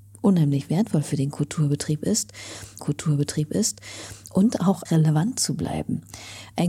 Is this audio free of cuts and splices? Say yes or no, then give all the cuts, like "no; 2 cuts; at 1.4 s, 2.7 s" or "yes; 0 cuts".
no; 2 cuts; at 2.8 s, 4.9 s